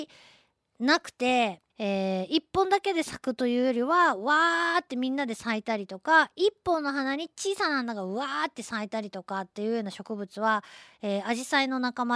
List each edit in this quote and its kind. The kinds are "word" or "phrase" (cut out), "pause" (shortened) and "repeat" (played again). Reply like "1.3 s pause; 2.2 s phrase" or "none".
1.7 s pause